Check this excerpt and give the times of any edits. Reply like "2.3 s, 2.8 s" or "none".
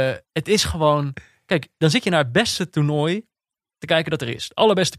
none